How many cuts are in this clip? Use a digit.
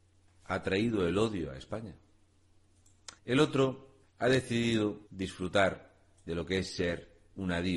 3